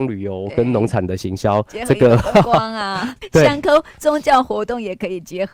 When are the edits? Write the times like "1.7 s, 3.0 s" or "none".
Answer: 3.2 s